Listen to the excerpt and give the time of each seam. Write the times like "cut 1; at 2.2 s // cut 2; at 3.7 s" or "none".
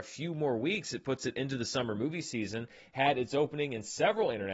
none